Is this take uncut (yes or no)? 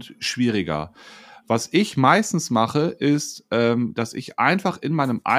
yes